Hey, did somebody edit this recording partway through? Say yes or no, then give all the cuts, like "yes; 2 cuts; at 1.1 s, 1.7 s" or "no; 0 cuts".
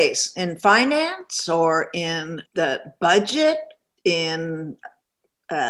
yes; 1 cut; at 2.5 s